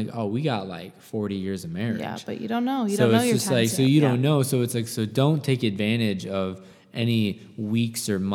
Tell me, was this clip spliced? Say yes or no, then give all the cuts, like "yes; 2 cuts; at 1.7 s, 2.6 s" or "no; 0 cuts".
no; 0 cuts